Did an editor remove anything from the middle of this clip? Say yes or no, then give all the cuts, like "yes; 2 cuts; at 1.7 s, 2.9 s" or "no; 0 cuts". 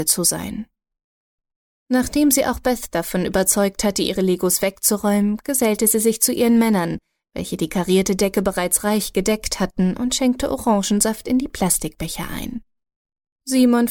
no; 0 cuts